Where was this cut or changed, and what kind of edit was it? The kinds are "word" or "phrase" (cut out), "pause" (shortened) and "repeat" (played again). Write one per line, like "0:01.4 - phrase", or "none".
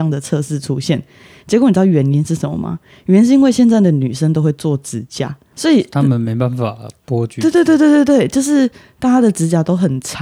0:05.5 - word